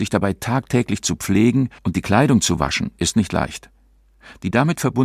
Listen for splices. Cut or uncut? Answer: cut